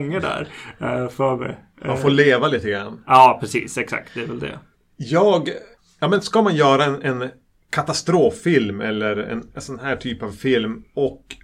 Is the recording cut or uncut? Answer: uncut